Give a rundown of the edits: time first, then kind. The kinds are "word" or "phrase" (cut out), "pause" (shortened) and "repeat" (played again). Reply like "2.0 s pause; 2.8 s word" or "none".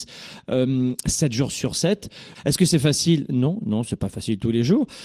none